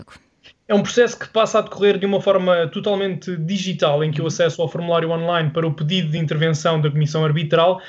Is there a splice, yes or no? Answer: no